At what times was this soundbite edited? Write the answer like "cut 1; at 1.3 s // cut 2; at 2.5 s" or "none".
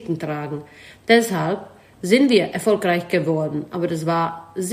none